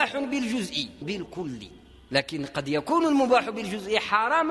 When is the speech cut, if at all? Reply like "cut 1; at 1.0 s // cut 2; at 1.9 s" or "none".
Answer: cut 1; at 1.0 s